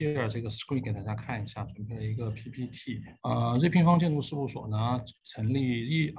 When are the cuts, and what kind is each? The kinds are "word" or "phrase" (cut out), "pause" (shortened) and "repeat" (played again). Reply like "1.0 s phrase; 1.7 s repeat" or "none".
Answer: 3.2 s pause